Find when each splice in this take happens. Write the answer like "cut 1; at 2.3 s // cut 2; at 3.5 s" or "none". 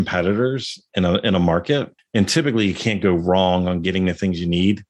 cut 1; at 2.0 s